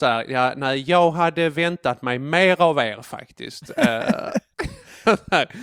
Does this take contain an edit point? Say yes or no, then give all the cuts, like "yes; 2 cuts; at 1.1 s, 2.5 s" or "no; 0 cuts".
no; 0 cuts